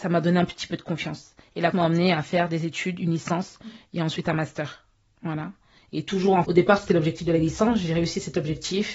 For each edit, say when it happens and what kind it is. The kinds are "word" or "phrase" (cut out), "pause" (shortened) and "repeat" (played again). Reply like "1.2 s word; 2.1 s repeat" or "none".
1.7 s word; 6.4 s word